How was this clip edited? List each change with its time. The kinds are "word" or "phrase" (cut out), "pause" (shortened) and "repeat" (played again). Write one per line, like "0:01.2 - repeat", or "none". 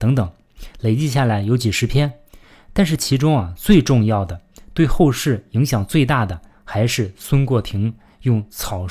none